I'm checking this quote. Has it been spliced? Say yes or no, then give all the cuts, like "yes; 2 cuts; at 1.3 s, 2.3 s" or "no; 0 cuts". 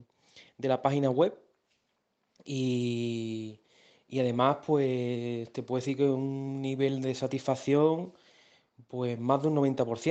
no; 0 cuts